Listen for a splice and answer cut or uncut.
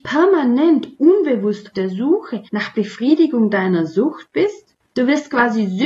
cut